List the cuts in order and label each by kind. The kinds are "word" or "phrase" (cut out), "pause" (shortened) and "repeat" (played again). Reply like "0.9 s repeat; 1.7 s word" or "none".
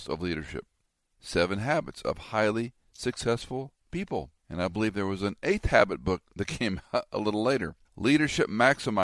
4.4 s pause; 7.9 s pause